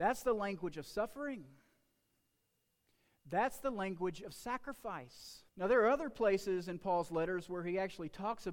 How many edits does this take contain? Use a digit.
1